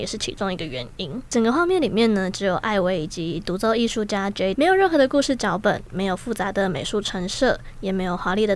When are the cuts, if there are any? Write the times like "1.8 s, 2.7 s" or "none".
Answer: 4.5 s